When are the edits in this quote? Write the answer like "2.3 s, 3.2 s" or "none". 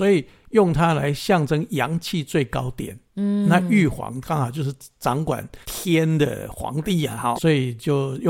5.6 s, 7.3 s